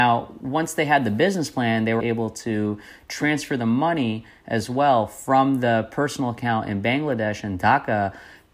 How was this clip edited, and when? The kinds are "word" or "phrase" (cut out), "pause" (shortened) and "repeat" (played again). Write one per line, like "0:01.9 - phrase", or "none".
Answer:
0:02.0 - word